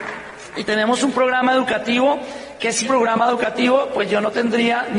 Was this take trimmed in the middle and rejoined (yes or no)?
yes